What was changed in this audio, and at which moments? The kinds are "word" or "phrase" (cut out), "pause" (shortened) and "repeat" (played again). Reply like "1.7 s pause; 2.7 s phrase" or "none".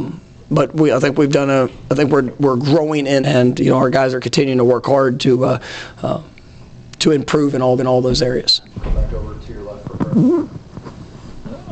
3.2 s word; 7.8 s repeat; 8.7 s pause

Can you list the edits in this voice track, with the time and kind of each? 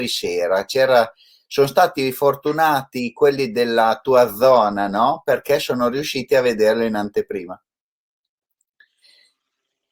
none

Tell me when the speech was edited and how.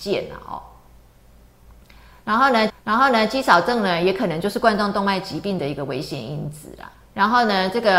2.7 s repeat; 6.9 s pause

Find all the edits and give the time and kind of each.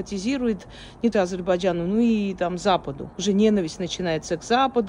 1.1 s phrase; 3.1 s pause

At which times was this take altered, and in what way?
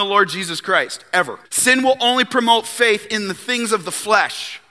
1.5 s pause

